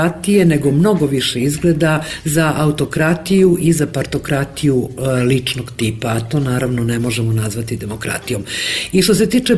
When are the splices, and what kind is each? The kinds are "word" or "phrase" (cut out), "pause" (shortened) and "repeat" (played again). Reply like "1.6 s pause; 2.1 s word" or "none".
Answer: none

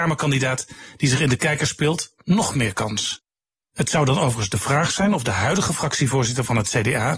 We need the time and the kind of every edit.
none

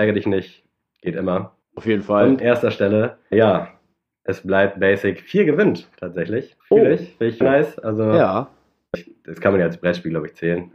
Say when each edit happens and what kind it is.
1.6 s pause; 2.4 s word; 3.3 s word; 6.6 s pause; 7.4 s word; 8.9 s word

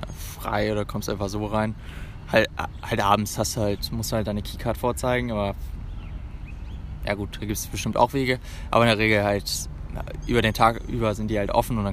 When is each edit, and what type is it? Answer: none

